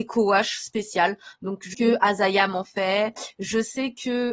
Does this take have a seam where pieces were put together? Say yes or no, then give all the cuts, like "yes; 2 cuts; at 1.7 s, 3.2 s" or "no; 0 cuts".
yes; 1 cut; at 1.7 s